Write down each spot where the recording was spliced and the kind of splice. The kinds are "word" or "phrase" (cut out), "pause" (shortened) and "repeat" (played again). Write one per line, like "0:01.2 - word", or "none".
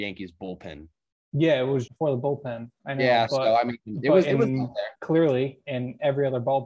0:01.9 - word
0:04.9 - pause